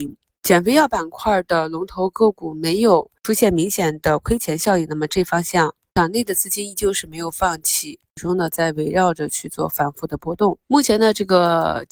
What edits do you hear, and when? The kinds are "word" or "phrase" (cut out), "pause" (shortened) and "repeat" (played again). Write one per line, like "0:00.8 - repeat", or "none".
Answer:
0:10.6 - pause